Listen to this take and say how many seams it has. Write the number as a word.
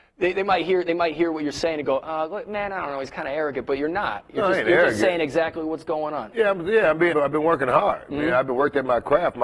one